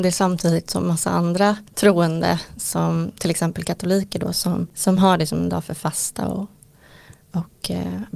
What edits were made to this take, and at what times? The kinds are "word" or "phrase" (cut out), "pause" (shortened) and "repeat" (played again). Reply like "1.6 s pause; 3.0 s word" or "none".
none